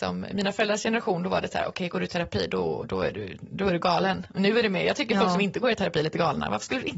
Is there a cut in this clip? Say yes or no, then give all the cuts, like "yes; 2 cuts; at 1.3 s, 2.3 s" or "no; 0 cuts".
no; 0 cuts